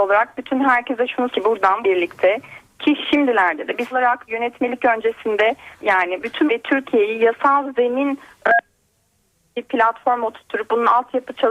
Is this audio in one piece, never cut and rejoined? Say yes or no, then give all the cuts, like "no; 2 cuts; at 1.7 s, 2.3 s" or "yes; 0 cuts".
no; 6 cuts; at 1.3 s, 1.8 s, 3.9 s, 4.3 s, 5.8 s, 6.5 s